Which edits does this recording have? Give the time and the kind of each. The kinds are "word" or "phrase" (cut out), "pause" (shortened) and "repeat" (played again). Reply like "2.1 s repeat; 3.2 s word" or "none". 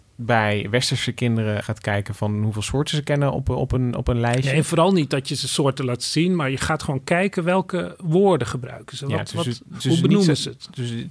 1.6 s word; 9.8 s word